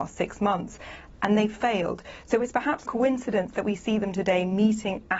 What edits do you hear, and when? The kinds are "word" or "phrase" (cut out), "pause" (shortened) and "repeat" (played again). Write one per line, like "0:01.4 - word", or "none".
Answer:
0:02.8 - word